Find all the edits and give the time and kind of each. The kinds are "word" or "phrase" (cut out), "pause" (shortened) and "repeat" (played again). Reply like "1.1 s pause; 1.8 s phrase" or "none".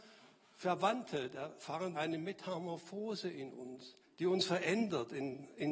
1.9 s word; 4.0 s pause